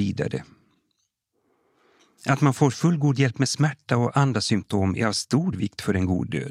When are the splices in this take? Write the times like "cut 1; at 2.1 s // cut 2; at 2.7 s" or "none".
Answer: none